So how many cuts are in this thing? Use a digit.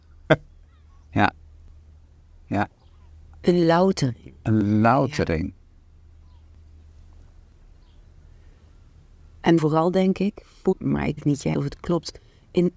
4